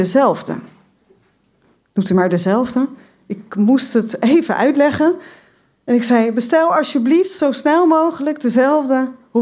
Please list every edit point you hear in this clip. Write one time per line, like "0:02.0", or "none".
none